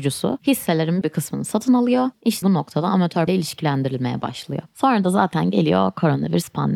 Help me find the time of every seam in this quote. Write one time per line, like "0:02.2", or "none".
0:01.0
0:02.4
0:03.3